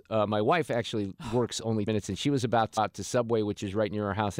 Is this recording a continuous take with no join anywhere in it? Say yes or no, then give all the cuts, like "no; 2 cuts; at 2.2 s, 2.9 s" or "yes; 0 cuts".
no; 2 cuts; at 1.9 s, 2.8 s